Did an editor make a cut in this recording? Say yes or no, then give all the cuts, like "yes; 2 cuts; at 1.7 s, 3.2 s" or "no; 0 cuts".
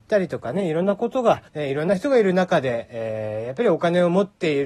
yes; 1 cut; at 1.5 s